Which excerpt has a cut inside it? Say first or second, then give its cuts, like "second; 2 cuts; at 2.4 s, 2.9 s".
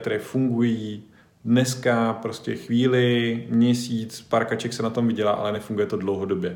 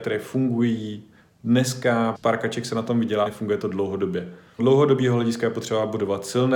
second; 3 cuts; at 2.1 s, 3.3 s, 4.6 s